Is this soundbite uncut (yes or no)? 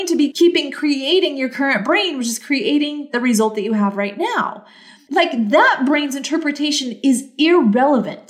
yes